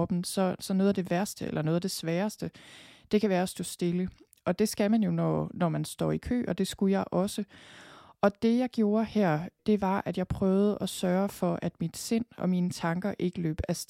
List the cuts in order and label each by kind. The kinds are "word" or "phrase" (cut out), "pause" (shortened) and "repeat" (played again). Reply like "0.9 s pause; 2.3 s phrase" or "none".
none